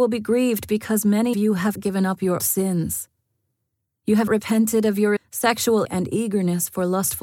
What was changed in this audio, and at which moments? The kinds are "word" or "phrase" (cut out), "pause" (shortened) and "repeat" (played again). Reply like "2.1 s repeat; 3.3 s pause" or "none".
1.3 s word; 1.7 s word; 2.4 s word; 4.3 s word; 5.2 s word; 5.8 s word